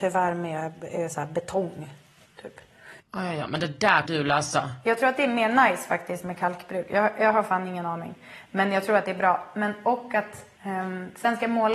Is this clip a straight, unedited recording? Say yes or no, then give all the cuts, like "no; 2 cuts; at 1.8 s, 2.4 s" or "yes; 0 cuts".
no; 3 cuts; at 3.0 s, 4.0 s, 10.6 s